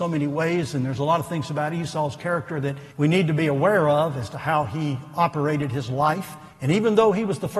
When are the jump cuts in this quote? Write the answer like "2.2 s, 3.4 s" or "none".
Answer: 2.9 s, 6.5 s